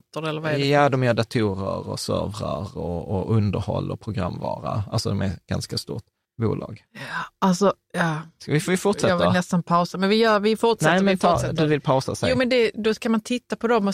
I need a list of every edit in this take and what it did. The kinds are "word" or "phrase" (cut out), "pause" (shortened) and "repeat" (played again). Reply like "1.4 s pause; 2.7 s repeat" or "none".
6.2 s pause